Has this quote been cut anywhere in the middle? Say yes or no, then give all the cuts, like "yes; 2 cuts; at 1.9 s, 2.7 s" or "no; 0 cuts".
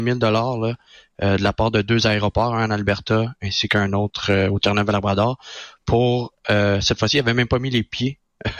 no; 0 cuts